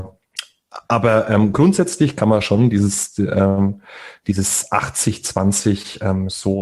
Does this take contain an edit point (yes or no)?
no